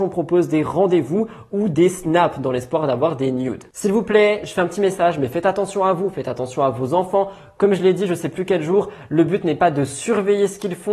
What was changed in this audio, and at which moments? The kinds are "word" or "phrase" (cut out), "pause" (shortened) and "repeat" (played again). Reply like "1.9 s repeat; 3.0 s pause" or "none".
none

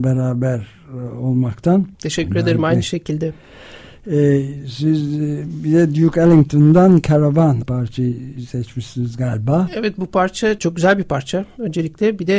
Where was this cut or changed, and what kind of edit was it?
1.9 s pause; 7.6 s word; 10.6 s word

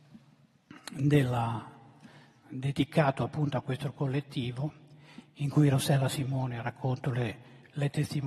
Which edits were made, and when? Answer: 2.4 s word

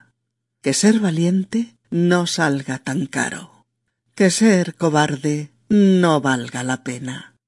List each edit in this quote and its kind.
1.8 s pause

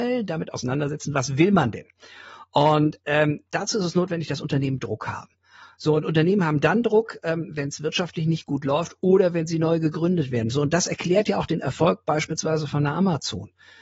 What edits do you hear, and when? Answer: none

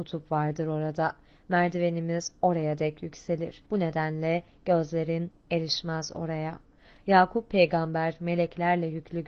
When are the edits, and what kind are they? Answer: 3.7 s pause

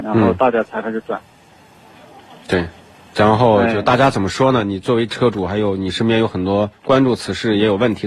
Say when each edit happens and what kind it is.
none

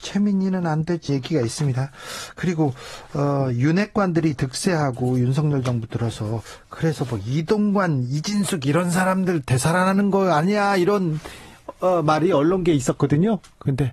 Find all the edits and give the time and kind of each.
1.1 s word

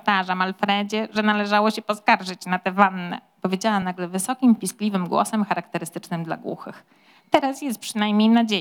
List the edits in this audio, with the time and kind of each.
none

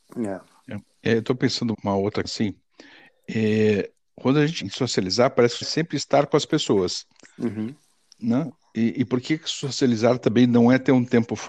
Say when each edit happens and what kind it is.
1.7 s word; 2.2 s word; 4.6 s word; 5.6 s word

